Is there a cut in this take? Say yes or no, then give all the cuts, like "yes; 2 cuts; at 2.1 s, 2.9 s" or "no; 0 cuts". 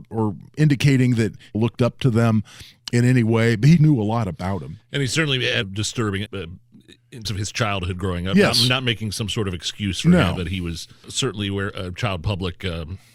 yes; 6 cuts; at 1.5 s, 3.8 s, 5.6 s, 6.3 s, 7.2 s, 11.0 s